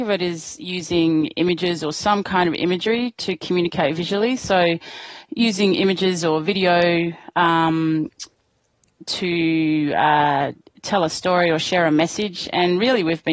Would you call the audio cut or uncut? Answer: uncut